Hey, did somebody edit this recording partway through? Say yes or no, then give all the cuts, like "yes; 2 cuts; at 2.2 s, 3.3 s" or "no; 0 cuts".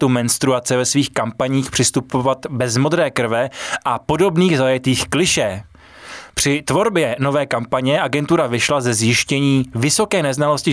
no; 0 cuts